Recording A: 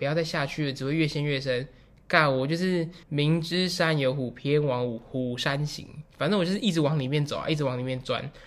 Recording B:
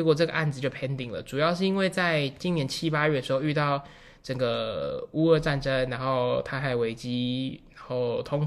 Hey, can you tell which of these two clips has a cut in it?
A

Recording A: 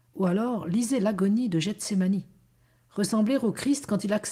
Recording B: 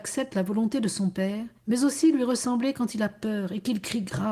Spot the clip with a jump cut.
B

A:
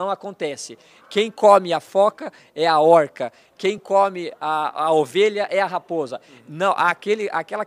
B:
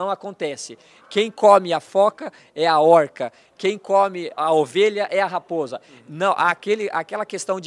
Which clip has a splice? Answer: B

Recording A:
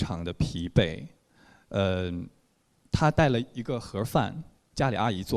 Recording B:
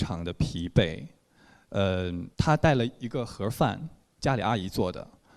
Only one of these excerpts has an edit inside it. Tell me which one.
B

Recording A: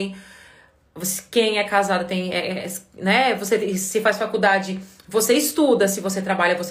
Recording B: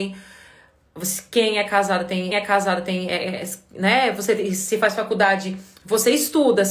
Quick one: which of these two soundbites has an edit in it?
B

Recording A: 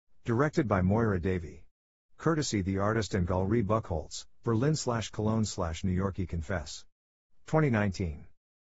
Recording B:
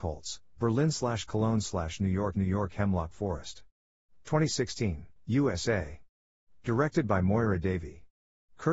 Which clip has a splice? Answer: B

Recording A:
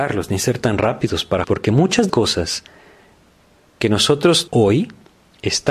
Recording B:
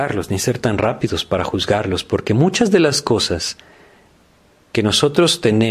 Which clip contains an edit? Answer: A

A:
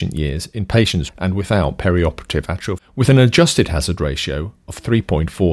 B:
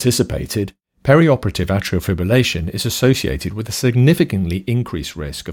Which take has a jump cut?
A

